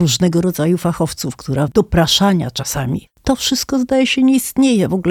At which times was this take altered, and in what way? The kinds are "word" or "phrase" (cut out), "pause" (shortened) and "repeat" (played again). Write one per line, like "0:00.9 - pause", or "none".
0:01.7 - word
0:03.1 - phrase